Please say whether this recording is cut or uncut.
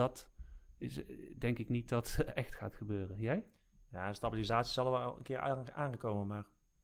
uncut